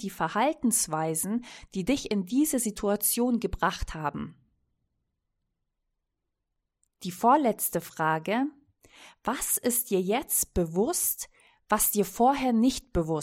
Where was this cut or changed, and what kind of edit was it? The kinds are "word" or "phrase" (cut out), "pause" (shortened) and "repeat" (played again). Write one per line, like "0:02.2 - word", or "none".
none